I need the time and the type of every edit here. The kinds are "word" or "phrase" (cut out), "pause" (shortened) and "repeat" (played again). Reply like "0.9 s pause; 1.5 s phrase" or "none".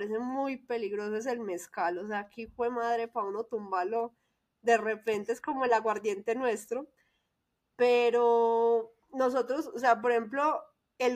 9.0 s pause